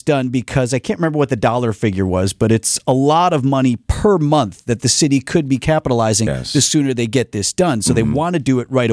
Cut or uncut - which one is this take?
cut